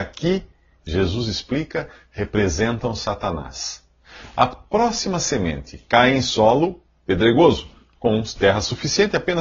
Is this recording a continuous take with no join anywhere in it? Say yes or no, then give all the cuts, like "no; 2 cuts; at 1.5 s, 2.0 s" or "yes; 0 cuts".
yes; 0 cuts